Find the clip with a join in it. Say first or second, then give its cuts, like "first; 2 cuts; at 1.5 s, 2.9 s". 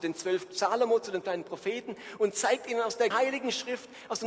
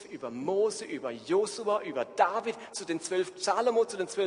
first; 2 cuts; at 1.2 s, 3.1 s